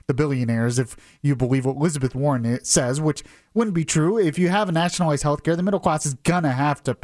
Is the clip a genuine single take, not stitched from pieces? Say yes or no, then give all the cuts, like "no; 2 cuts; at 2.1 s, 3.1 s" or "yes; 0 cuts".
yes; 0 cuts